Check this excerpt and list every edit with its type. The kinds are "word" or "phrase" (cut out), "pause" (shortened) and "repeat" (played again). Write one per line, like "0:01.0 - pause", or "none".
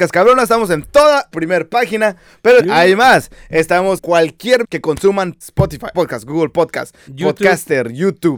0:01.3 - word
0:02.6 - word
0:04.0 - word
0:04.6 - word
0:05.4 - word
0:05.9 - word
0:07.1 - word